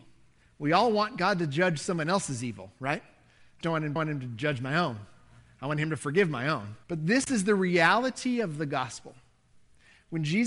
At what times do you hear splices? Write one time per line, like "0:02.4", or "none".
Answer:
0:03.6
0:04.0
0:06.8